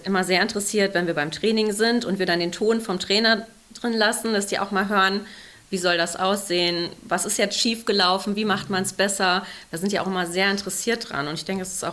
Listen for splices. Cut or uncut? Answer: uncut